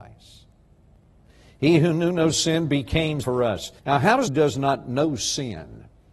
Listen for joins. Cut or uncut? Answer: cut